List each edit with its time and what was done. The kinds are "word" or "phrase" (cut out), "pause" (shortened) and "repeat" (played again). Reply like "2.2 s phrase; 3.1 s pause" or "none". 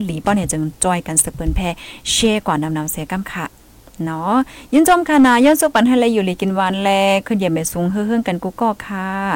none